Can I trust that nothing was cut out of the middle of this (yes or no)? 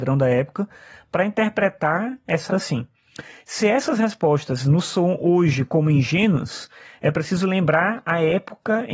no